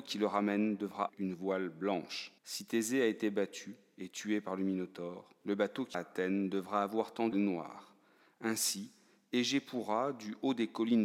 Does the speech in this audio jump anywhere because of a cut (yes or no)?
yes